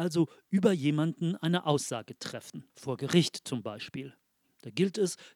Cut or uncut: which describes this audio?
cut